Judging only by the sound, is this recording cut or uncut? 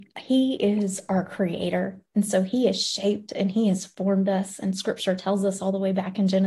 uncut